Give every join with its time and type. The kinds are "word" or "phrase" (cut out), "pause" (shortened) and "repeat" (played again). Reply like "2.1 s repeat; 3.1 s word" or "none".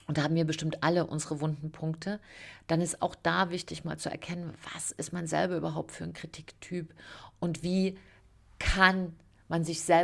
none